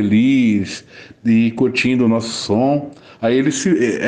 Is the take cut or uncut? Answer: uncut